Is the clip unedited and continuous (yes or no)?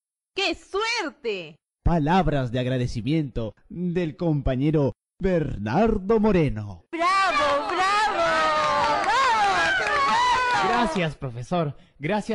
yes